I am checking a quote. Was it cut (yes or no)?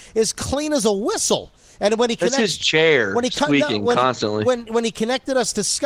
no